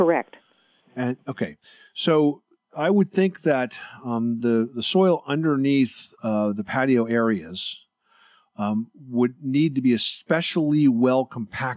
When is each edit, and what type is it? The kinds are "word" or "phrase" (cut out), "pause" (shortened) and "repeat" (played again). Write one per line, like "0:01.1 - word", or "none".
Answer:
none